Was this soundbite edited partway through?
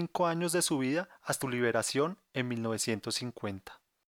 yes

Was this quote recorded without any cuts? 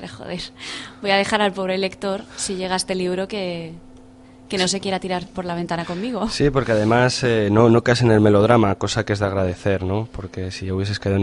yes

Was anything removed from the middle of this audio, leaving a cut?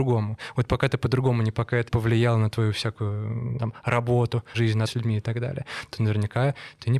yes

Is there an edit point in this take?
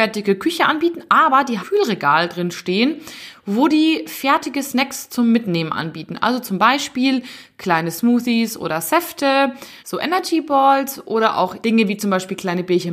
yes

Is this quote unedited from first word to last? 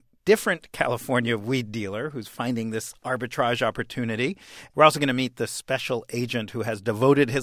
yes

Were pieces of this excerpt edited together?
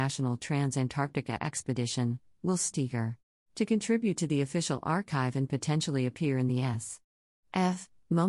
yes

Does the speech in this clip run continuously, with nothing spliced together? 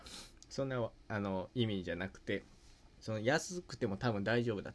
no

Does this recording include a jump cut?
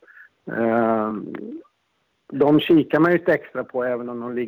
no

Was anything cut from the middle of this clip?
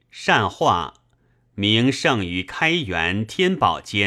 no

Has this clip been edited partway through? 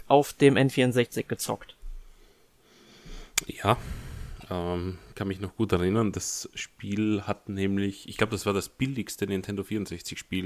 no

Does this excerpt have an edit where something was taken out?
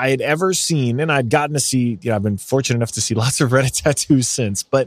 no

